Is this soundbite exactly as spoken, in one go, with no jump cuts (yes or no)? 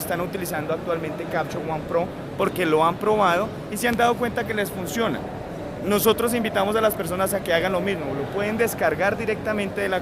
yes